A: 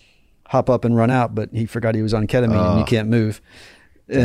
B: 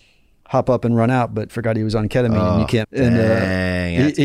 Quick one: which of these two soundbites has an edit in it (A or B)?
B